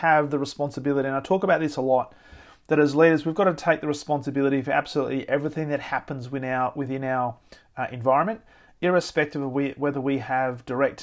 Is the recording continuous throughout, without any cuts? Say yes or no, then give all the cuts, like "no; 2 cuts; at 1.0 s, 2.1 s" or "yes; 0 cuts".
yes; 0 cuts